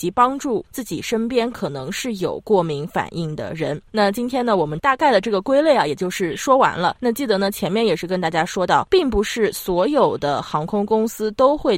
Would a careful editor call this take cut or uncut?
cut